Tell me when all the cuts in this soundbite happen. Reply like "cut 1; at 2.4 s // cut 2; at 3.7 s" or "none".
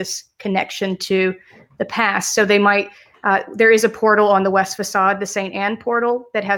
none